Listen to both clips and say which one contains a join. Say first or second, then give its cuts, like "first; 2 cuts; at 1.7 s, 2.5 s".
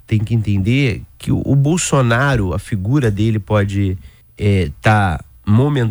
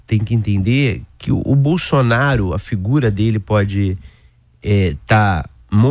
first; 1 cut; at 4.2 s